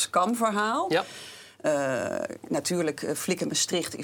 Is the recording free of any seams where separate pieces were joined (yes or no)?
yes